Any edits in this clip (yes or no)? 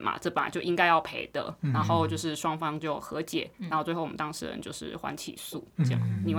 yes